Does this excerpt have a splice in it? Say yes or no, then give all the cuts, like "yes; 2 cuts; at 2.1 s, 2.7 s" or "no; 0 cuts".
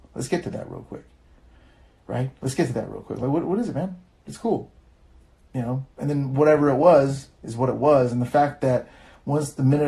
no; 0 cuts